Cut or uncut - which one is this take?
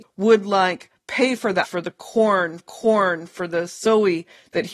cut